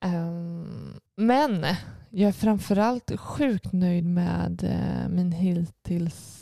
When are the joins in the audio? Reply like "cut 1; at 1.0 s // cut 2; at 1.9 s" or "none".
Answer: none